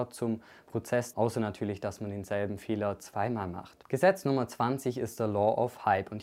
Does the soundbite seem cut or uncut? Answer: cut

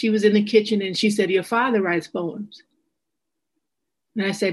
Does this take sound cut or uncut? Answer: uncut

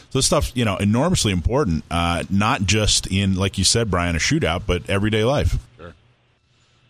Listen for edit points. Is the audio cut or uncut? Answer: cut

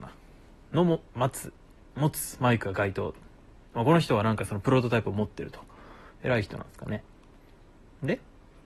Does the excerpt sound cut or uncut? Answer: uncut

